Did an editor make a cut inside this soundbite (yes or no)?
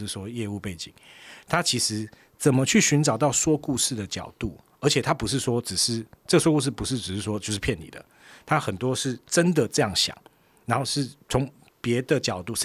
no